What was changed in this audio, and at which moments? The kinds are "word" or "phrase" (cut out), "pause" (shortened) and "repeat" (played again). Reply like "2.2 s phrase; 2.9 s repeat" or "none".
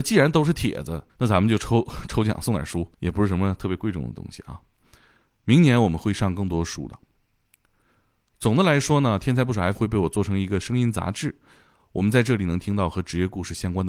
1.1 s pause; 2.9 s pause; 9.7 s word